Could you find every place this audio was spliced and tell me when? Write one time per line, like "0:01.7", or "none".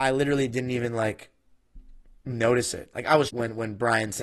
0:03.3